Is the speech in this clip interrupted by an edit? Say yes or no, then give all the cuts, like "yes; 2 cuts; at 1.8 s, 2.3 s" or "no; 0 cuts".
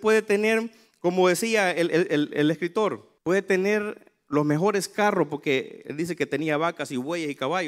yes; 1 cut; at 3.2 s